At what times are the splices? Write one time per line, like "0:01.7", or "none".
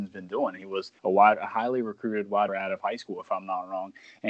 0:01.0
0:02.5